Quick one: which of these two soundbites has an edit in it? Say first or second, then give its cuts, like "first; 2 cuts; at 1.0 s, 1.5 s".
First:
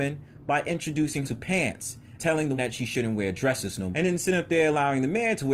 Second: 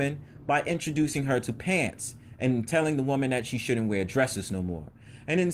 first; 4 cuts; at 1.2 s, 2.2 s, 2.6 s, 3.9 s